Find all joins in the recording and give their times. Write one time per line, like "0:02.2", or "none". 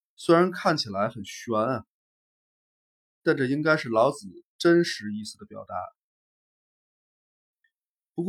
none

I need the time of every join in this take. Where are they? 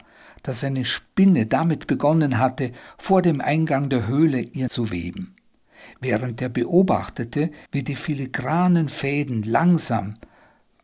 0:04.7
0:07.7

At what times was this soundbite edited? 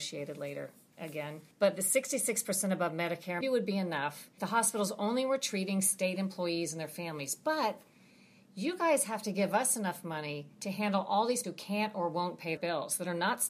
0:01.5
0:03.4
0:04.4
0:10.5
0:11.4
0:12.6

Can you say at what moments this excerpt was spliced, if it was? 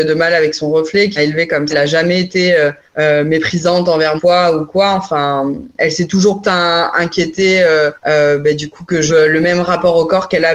0:01.2
0:01.7
0:02.9
0:04.2
0:06.4
0:08.0
0:09.1

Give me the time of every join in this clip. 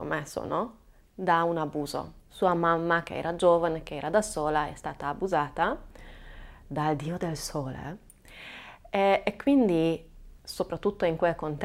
0:02.2
0:10.4

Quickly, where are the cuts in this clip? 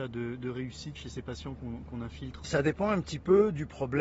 0:00.9
0:02.4

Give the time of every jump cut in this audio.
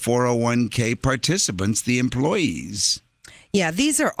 none

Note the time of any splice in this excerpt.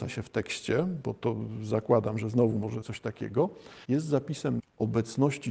0:02.8
0:03.8
0:04.6

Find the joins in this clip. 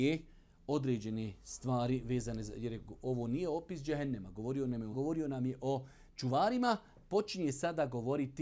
0:04.9

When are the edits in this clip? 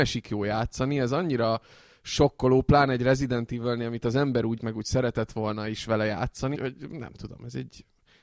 0:04.6
0:06.5

